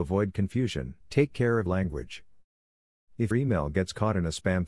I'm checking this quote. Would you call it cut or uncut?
cut